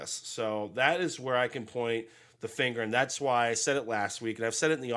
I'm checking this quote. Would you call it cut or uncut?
uncut